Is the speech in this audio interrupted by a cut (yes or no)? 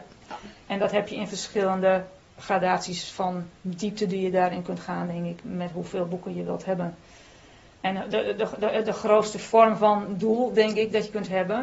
no